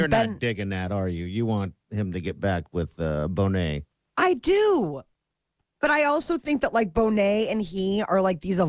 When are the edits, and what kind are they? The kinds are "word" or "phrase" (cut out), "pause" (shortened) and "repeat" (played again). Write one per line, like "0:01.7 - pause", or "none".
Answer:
none